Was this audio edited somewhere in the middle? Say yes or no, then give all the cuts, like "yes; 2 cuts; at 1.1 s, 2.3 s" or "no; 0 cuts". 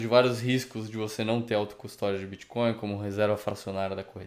no; 0 cuts